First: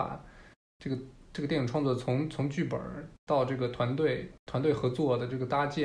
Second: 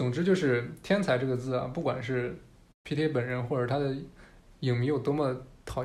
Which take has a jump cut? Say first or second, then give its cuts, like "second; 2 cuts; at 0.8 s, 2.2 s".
first; 1 cut; at 3.2 s